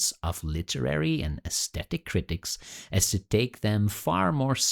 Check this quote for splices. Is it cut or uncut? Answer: uncut